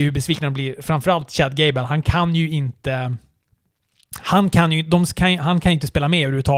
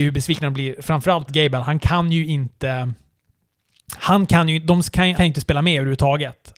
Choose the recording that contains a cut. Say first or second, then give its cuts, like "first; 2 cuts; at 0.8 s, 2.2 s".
second; 2 cuts; at 1.3 s, 5.1 s